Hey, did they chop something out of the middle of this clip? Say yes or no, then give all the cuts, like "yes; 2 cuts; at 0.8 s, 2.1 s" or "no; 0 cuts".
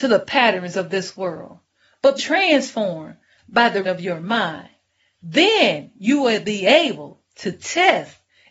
yes; 2 cuts; at 2.2 s, 3.8 s